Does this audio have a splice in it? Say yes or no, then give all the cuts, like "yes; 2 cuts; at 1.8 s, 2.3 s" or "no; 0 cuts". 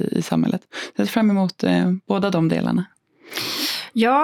no; 0 cuts